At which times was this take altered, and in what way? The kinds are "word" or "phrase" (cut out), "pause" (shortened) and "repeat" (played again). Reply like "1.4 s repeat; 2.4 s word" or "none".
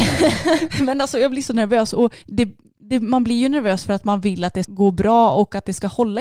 2.2 s pause; 4.6 s word